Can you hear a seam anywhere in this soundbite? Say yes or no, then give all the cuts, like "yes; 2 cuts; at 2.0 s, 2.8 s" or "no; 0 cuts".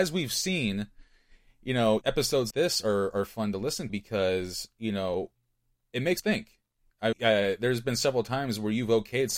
yes; 5 cuts; at 2.0 s, 2.5 s, 3.9 s, 6.2 s, 7.1 s